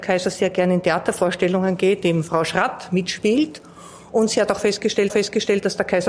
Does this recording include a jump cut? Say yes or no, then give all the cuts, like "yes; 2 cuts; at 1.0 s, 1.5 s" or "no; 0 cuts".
yes; 2 cuts; at 2.0 s, 5.1 s